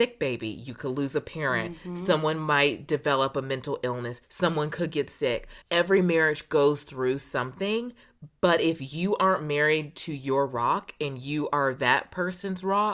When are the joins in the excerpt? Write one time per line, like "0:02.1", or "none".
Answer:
0:04.2
0:05.6